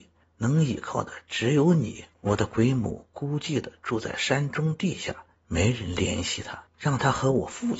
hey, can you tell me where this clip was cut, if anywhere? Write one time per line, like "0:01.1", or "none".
0:02.1
0:05.3